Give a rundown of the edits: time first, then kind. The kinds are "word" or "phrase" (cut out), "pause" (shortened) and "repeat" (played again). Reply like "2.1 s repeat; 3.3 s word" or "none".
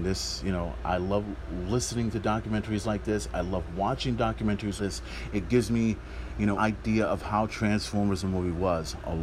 4.8 s word; 6.6 s word